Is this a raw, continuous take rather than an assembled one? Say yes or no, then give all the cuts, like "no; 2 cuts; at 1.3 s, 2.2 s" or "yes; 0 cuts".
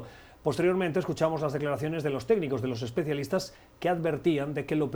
yes; 0 cuts